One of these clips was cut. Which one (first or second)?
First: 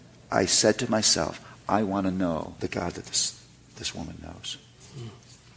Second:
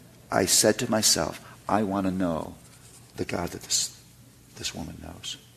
first